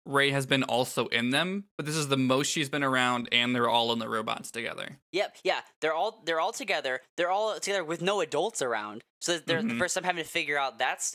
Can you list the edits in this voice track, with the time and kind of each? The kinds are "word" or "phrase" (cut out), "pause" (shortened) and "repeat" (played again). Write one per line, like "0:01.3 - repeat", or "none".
0:05.0 - pause